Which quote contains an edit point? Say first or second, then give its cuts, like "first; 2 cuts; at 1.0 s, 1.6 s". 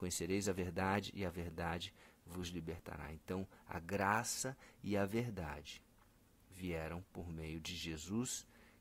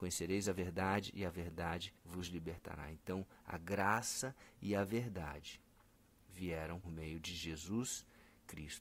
second; 2 cuts; at 2.0 s, 6.8 s